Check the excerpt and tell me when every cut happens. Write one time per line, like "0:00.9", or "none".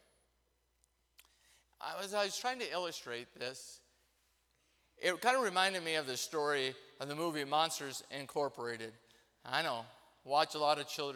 none